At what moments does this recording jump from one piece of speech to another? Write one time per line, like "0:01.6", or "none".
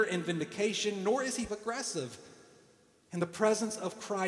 0:01.5